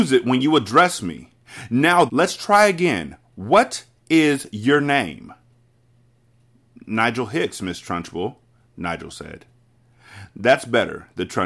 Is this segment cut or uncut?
cut